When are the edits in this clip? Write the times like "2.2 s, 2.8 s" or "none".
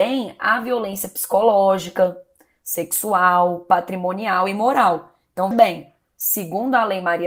5.5 s